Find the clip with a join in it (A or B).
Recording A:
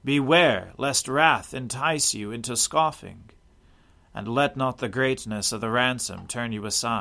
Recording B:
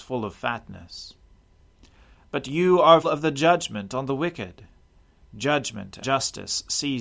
B